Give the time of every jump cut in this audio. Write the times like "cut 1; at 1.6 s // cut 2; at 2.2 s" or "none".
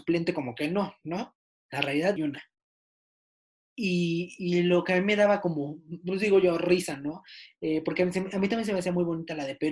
cut 1; at 1.5 s // cut 2; at 2.2 s

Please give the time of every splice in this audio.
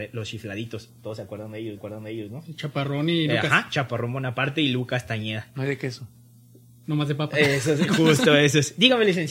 cut 1; at 1.8 s

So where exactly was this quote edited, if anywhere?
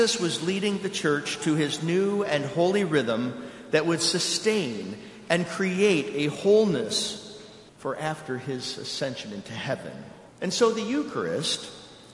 cut 1; at 7.7 s // cut 2; at 10.3 s

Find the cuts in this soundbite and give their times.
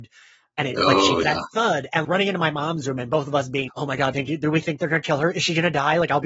cut 1; at 1.2 s // cut 2; at 2.0 s // cut 3; at 3.7 s // cut 4; at 4.1 s

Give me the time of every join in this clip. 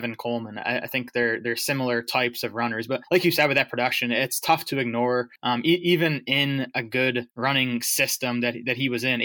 cut 1; at 3.0 s // cut 2; at 5.4 s // cut 3; at 7.3 s

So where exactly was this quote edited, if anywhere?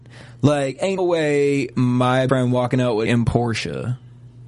cut 1; at 1.0 s // cut 2; at 2.3 s // cut 3; at 3.1 s

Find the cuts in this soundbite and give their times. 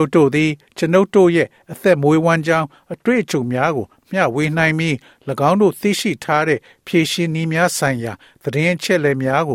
none

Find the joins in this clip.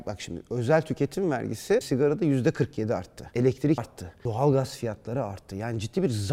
cut 1; at 1.8 s // cut 2; at 3.8 s

